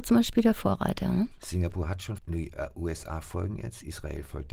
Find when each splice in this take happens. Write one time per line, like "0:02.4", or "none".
0:02.2